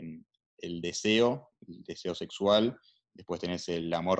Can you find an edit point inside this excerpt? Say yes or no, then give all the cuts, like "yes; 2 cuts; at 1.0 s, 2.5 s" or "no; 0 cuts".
no; 0 cuts